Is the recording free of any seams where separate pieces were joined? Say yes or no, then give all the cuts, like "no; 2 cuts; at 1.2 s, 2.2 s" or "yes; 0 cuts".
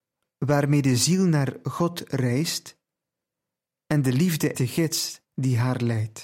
no; 2 cuts; at 4.5 s, 5.2 s